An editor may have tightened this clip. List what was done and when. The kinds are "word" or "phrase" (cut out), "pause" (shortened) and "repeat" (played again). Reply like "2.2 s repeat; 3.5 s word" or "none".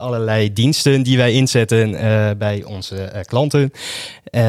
none